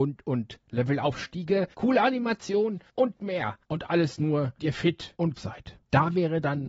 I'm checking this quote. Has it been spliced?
yes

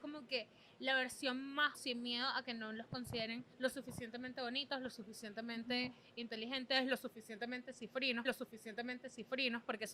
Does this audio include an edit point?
yes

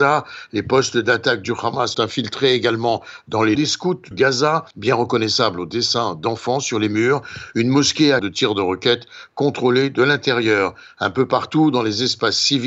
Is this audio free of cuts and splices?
no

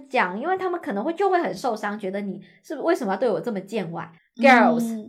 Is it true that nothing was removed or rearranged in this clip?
no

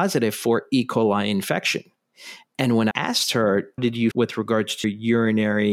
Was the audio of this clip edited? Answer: yes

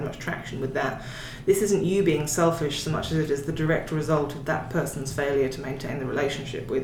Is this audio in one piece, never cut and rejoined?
yes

